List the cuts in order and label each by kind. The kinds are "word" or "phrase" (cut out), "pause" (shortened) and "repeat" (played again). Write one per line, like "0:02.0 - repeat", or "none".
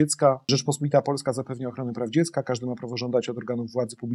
none